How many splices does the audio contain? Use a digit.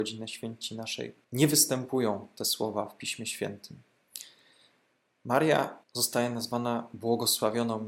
2